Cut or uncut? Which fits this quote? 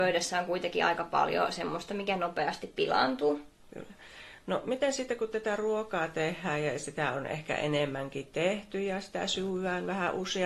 uncut